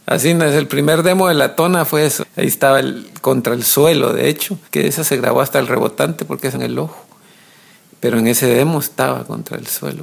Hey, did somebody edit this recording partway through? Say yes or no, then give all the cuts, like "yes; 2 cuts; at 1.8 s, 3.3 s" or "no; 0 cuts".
yes; 3 cuts; at 2.2 s, 4.6 s, 6.5 s